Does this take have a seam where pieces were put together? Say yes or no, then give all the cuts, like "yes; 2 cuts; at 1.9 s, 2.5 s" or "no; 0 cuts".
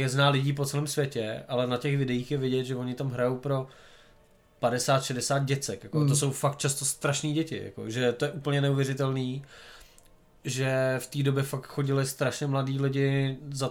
no; 0 cuts